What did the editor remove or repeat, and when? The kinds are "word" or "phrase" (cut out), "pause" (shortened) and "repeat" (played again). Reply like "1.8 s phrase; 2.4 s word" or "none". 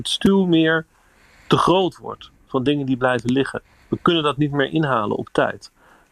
none